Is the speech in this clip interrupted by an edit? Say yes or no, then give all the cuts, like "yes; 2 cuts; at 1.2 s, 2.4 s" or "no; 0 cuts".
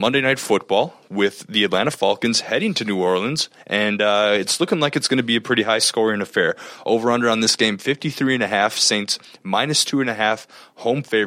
no; 0 cuts